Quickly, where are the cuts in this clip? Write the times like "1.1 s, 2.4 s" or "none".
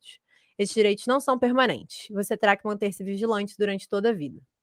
none